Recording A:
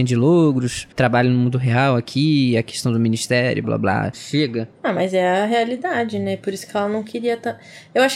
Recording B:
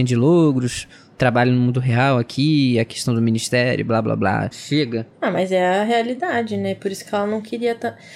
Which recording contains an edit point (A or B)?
A